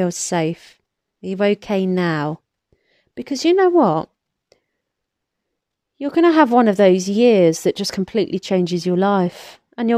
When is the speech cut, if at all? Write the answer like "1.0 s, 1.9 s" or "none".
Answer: none